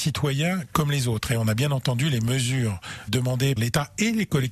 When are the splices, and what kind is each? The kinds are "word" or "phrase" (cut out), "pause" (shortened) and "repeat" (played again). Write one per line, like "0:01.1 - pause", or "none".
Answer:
0:03.1 - word
0:03.6 - word